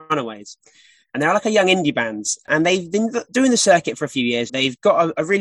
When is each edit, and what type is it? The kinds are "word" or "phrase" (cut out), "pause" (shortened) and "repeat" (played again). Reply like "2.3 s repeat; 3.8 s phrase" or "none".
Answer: 4.5 s word